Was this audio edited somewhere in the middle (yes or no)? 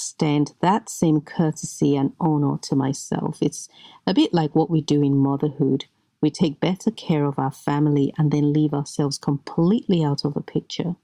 no